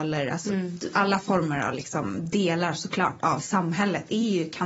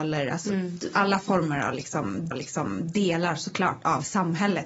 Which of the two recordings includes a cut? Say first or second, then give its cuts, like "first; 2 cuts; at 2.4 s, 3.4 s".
second; 1 cut; at 2.3 s